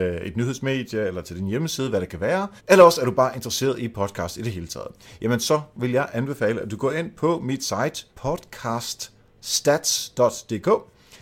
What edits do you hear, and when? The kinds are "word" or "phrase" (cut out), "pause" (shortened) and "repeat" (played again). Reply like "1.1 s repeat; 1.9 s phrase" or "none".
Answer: 2.6 s pause; 8.1 s pause

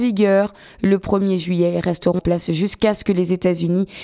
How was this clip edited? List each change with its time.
2.2 s word

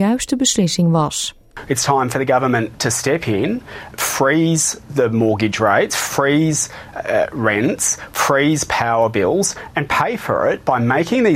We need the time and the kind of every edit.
3.9 s word

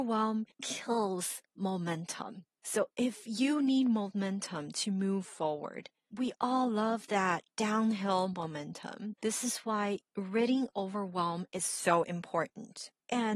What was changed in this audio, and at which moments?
none

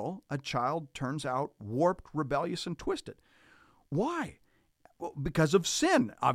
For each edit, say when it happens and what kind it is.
none

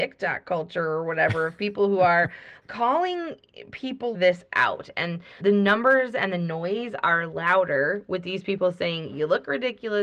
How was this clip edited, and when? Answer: 2.6 s word; 4.1 s word; 5.4 s word

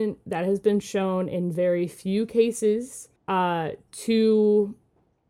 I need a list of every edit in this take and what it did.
3.2 s pause

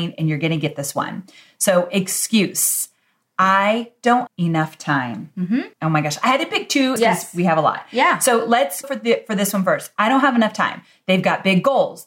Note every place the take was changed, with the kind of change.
4.3 s word; 5.7 s pause; 7.0 s word; 8.8 s word

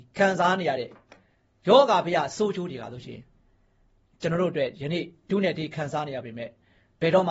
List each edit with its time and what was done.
none

